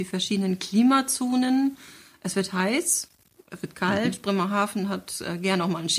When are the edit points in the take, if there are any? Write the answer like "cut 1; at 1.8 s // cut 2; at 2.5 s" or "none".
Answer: none